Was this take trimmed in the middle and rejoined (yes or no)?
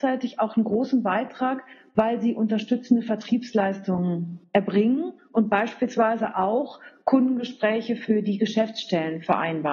no